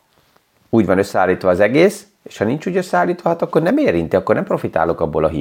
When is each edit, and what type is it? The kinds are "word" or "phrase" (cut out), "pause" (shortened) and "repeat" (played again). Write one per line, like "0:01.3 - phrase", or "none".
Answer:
none